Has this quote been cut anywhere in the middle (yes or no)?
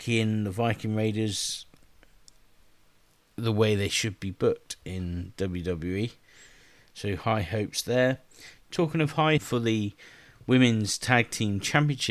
yes